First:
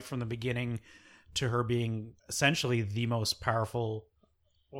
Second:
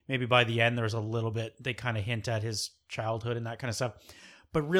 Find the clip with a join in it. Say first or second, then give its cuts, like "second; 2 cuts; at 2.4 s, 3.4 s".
first; 1 cut; at 2.2 s